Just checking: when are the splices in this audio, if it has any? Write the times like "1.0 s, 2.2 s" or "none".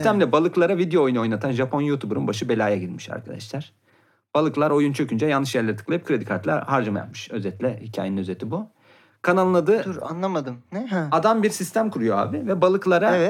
none